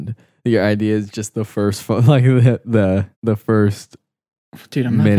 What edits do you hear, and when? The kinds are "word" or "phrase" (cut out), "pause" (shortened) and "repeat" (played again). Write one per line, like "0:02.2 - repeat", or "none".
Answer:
0:03.1 - pause